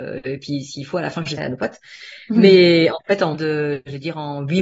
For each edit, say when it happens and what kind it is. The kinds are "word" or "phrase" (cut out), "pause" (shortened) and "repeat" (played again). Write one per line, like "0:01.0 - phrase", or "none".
0:01.4 - word
0:03.3 - word